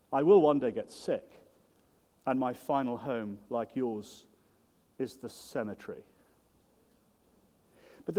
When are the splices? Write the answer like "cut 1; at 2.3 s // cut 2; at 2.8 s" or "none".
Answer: none